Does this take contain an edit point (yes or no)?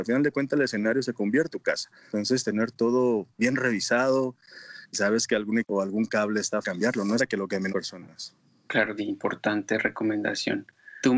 yes